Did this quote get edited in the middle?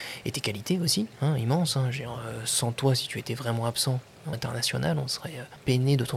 yes; 1 cut; at 4.3 s

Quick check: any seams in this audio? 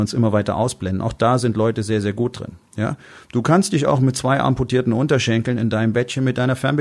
no; 0 cuts

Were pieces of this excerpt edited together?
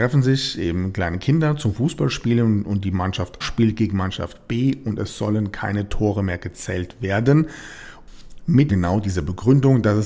yes; 2 cuts; at 3.4 s, 8.7 s

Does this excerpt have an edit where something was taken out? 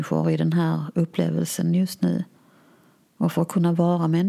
no; 0 cuts

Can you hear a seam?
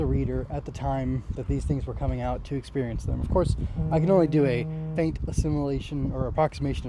yes; 1 cut; at 5.0 s

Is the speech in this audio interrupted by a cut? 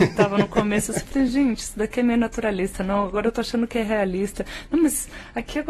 no; 0 cuts

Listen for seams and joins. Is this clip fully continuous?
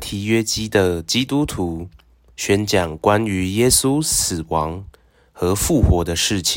yes; 0 cuts

